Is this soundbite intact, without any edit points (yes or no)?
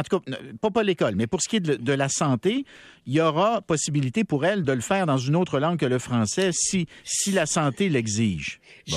yes